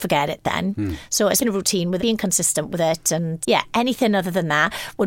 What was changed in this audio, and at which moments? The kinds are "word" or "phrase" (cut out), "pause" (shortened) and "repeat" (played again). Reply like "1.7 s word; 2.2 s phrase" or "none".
1.4 s word; 2.0 s word; 3.4 s word